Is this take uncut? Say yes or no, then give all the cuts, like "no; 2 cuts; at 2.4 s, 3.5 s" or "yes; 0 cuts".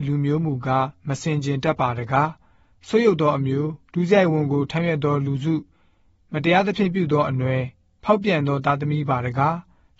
no; 1 cut; at 3.8 s